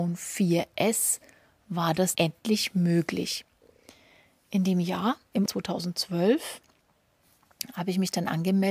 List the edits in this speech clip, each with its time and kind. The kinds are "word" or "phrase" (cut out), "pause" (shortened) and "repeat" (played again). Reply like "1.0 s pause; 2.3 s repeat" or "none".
2.1 s word; 5.5 s word